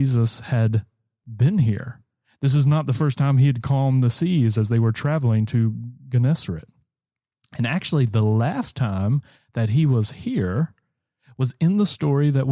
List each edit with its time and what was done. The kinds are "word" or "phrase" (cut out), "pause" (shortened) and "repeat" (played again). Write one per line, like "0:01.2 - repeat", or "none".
none